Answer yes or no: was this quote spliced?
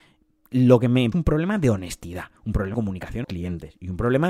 yes